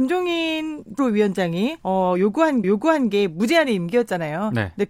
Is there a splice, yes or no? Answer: yes